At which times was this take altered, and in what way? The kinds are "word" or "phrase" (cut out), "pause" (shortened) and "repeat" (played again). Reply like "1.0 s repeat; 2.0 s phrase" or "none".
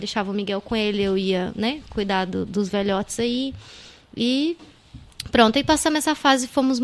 none